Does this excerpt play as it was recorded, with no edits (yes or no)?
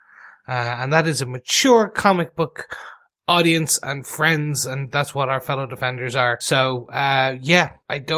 yes